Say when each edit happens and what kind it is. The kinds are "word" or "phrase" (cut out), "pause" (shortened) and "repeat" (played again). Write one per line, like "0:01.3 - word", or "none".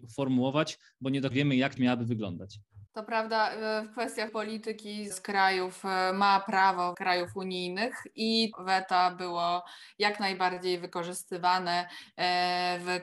0:01.3 - word
0:01.8 - phrase
0:02.9 - pause
0:04.3 - word
0:05.1 - phrase
0:06.9 - word
0:08.5 - phrase